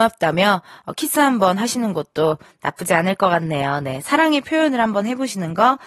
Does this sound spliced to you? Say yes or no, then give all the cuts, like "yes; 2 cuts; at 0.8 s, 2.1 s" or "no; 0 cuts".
no; 0 cuts